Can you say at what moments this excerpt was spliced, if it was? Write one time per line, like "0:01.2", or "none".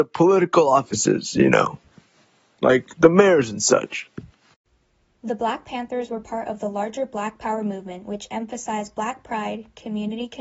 none